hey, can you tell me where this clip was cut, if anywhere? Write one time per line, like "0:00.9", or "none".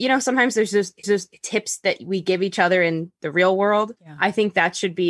0:01.0
0:04.0